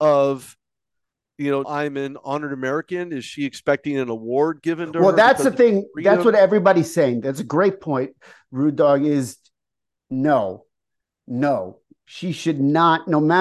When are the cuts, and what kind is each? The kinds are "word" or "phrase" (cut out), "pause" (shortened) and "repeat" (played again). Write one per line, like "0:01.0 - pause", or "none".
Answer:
0:01.6 - word